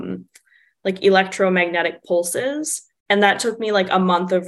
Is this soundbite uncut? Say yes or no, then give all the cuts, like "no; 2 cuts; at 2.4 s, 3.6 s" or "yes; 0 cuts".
yes; 0 cuts